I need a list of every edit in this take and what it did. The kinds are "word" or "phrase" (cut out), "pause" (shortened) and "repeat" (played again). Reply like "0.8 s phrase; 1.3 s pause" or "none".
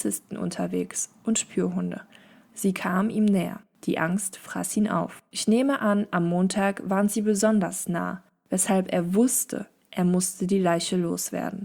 none